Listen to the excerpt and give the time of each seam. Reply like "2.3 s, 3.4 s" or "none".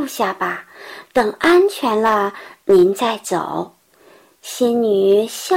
3.8 s